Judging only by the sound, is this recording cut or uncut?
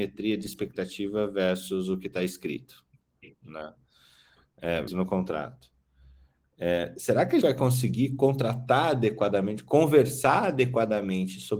cut